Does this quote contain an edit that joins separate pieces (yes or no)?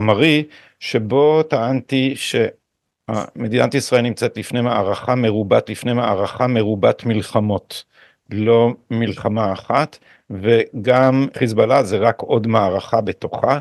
yes